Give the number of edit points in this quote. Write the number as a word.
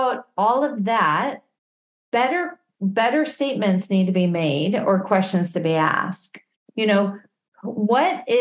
zero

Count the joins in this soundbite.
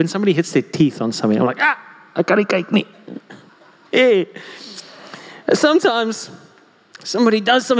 zero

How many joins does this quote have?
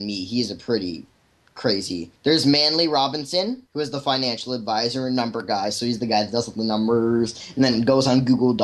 zero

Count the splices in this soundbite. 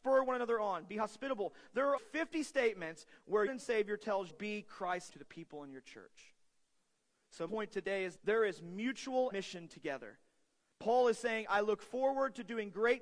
seven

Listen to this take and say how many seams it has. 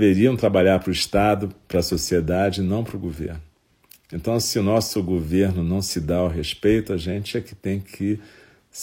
zero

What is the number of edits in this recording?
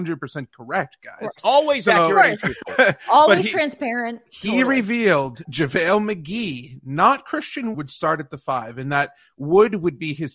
two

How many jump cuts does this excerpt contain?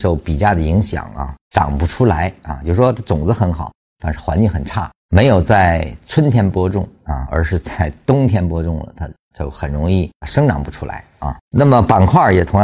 four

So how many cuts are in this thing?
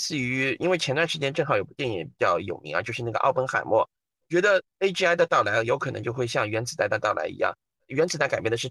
zero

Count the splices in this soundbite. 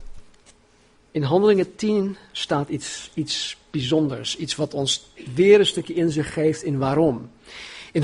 zero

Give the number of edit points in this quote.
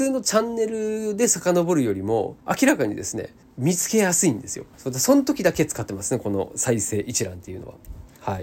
three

